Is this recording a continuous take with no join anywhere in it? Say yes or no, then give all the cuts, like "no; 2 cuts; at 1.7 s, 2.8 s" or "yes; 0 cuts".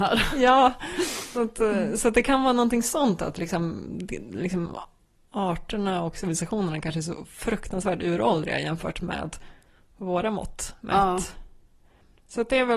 no; 1 cut; at 1.3 s